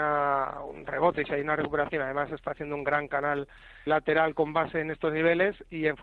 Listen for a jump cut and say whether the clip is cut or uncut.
cut